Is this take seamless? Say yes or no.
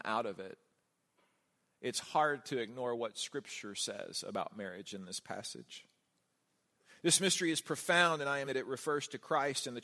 no